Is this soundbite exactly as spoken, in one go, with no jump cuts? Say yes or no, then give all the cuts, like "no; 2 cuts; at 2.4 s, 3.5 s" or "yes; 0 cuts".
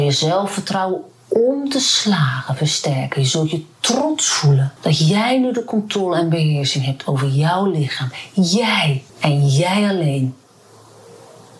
no; 2 cuts; at 4.8 s, 9.1 s